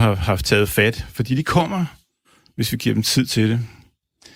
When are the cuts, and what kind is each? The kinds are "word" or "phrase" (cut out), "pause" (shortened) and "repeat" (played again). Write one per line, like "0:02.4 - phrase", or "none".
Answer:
none